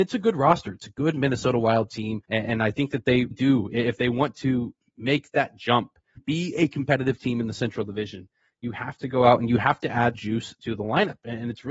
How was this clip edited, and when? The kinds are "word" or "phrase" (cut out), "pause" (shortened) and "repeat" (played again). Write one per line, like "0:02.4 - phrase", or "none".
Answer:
0:02.2 - pause
0:03.3 - word
0:06.2 - word
0:10.1 - word